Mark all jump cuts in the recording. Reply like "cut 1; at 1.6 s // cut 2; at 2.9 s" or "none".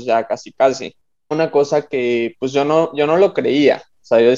cut 1; at 1.3 s